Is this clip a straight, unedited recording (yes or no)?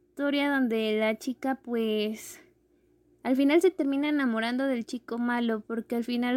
yes